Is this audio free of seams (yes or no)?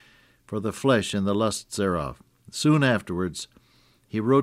yes